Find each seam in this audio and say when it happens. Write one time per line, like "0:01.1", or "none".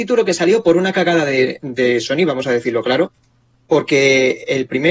none